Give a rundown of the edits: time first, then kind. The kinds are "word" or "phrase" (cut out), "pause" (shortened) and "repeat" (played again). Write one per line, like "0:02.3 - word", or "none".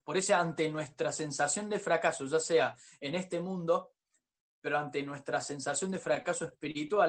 none